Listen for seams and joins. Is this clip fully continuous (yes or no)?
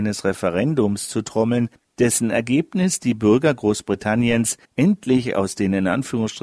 no